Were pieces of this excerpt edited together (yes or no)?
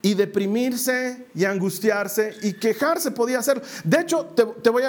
no